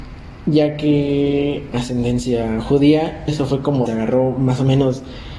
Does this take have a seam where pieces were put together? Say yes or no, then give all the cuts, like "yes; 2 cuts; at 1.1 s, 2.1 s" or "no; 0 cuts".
yes; 3 cuts; at 1.7 s, 3.3 s, 3.9 s